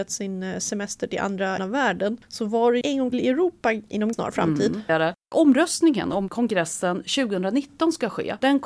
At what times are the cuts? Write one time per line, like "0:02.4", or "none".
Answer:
0:01.6
0:02.8
0:03.1
0:04.1
0:04.9
0:06.3

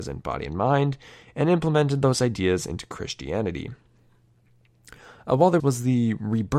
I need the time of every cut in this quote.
0:05.6

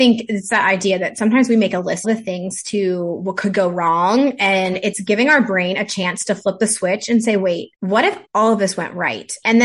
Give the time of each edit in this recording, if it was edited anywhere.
0:02.0
0:07.7
0:08.2

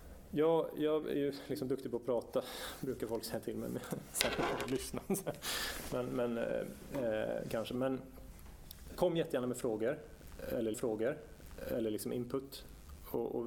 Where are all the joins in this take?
0:10.7

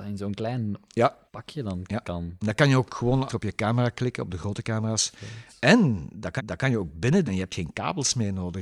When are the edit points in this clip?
0:01.3
0:03.3
0:06.4
0:07.3

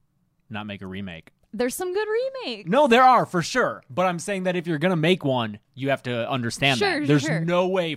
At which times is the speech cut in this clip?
0:05.6

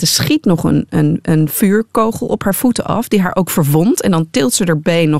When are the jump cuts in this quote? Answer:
none

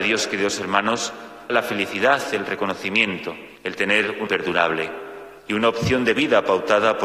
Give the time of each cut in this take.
0:01.5
0:03.6
0:04.3
0:05.4

